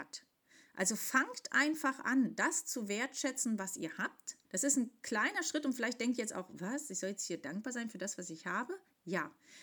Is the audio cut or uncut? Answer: cut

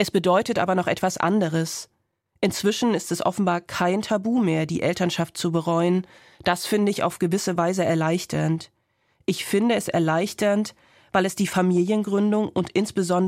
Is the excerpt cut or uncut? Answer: uncut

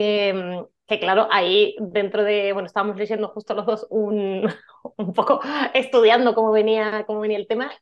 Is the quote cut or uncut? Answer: uncut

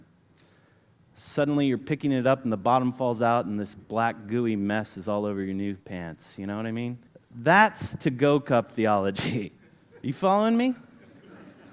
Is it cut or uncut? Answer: cut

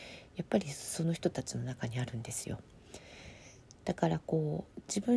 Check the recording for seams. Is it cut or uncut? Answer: uncut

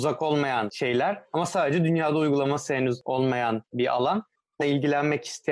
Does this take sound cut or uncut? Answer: cut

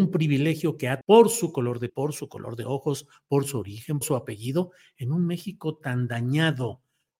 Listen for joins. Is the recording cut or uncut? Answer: cut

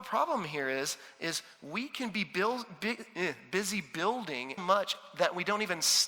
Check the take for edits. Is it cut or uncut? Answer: cut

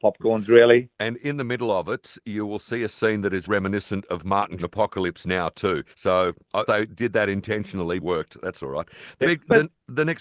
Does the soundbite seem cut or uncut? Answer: cut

